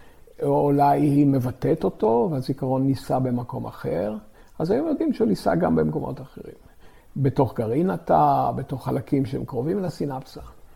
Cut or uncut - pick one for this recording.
uncut